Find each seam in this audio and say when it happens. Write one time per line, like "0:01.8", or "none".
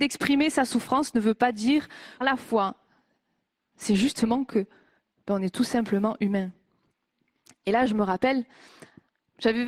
0:02.2